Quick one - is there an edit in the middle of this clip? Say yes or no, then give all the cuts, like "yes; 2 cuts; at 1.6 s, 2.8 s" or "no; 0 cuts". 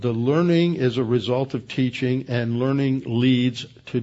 no; 0 cuts